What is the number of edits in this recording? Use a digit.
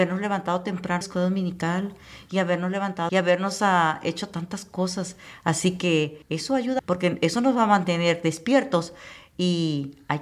4